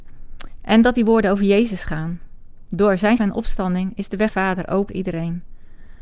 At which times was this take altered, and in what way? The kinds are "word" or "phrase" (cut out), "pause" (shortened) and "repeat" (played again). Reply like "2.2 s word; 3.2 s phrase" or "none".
3.2 s word; 4.3 s phrase; 4.9 s word